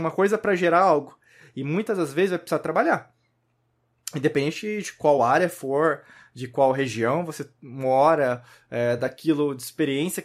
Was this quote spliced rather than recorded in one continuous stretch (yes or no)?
no